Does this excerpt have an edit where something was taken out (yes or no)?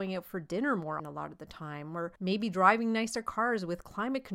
yes